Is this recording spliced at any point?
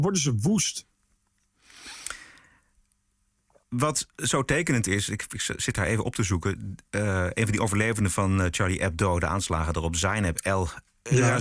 no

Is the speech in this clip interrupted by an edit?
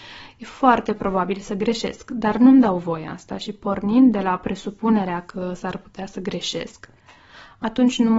no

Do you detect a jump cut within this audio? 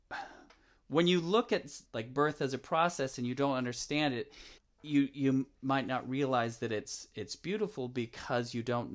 yes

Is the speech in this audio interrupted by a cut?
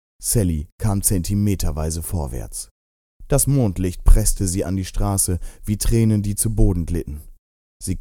no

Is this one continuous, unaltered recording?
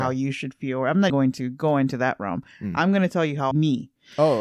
no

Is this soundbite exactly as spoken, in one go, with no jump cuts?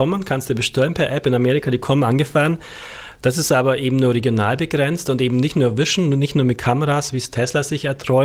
yes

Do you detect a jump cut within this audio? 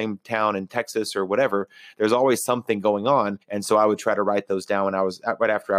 yes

